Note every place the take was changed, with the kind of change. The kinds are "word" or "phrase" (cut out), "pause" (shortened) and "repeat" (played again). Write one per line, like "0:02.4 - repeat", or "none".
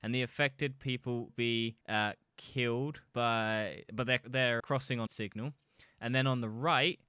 0:01.3 - word
0:01.8 - pause
0:03.1 - pause
0:04.2 - word
0:04.6 - word
0:05.1 - phrase